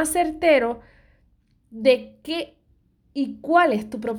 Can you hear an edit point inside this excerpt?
no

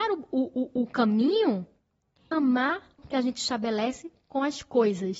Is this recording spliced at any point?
yes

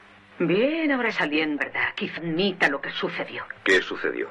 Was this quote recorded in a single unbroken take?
no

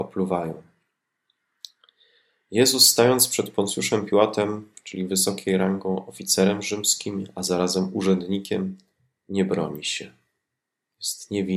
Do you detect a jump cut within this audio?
no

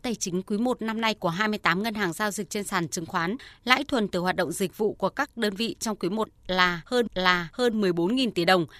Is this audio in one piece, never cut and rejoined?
no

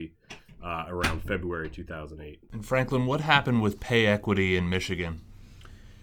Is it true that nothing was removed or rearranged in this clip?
yes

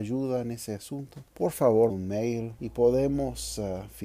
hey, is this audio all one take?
no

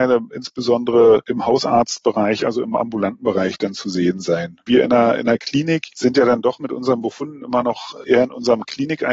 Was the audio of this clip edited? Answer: no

